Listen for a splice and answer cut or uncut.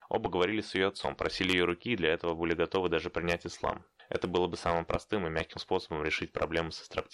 uncut